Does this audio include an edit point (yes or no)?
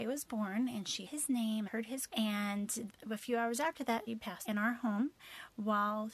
yes